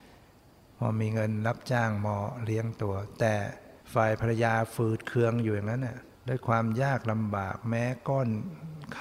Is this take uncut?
no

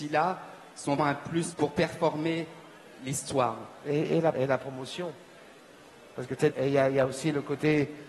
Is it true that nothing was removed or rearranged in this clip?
no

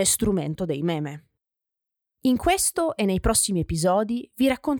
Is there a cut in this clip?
no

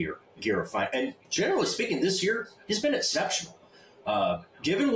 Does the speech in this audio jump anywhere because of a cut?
no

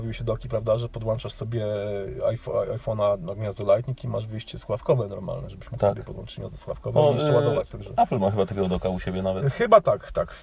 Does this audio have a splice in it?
no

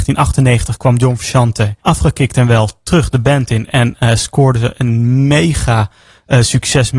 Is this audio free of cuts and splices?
no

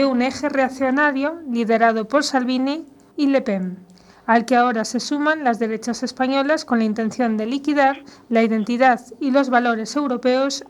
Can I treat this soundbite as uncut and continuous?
no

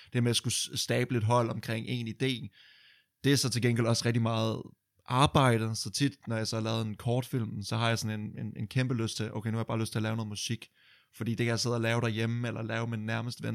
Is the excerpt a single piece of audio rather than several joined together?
yes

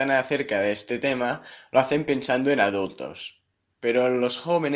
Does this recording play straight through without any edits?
yes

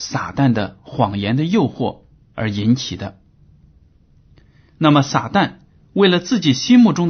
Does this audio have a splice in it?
no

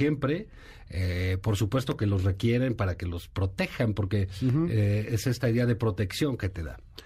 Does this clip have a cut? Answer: no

